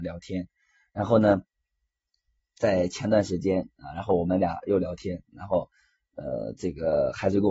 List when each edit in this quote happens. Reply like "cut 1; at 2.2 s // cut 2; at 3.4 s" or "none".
none